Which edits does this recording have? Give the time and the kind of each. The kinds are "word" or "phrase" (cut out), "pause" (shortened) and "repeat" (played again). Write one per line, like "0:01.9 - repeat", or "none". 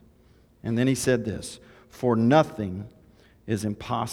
none